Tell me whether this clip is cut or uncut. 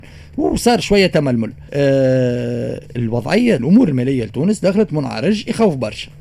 cut